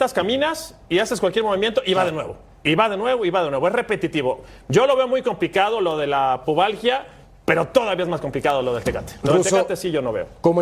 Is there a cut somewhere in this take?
no; 0 cuts

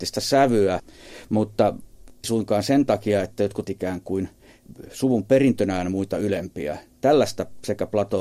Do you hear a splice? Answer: yes; 2 cuts; at 2.2 s, 3.6 s

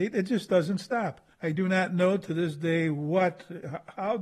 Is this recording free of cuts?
no; 1 cut; at 1.3 s

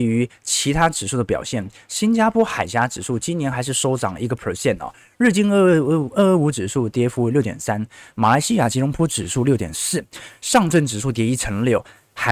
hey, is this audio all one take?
yes; 0 cuts

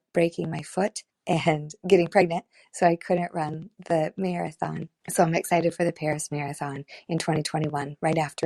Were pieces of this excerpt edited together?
no; 0 cuts

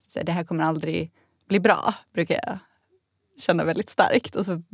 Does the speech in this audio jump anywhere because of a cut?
no; 0 cuts

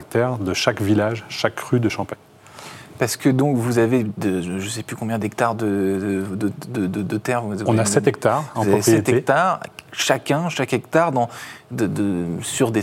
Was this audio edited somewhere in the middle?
no; 0 cuts

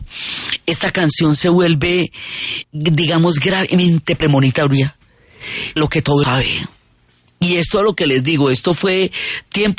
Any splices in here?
yes; 3 cuts; at 2.6 s, 5.8 s, 6.2 s

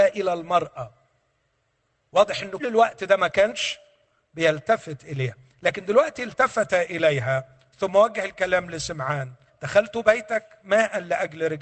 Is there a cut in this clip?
yes; 2 cuts; at 2.6 s, 9.5 s

